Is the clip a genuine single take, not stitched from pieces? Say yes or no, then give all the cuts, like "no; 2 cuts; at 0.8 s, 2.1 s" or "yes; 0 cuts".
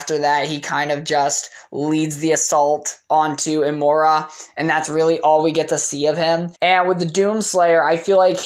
no; 1 cut; at 6.6 s